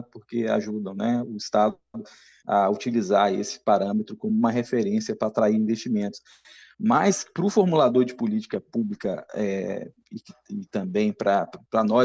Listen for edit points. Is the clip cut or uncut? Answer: uncut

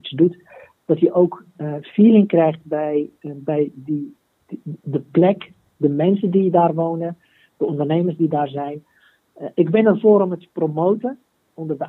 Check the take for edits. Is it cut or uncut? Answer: uncut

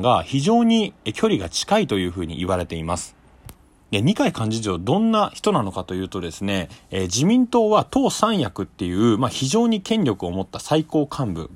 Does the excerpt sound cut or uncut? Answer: uncut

